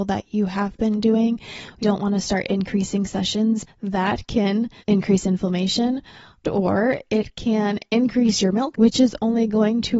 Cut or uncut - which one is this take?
cut